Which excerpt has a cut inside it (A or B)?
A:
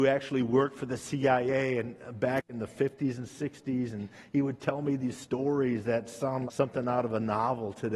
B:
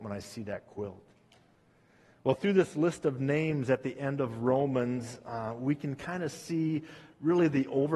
A